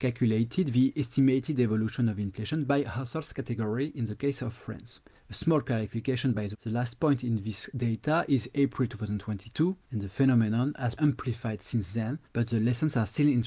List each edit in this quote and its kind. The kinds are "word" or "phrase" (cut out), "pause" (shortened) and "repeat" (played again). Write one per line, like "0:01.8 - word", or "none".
0:05.2 - pause
0:06.5 - word
0:09.8 - pause
0:11.0 - word
0:12.2 - pause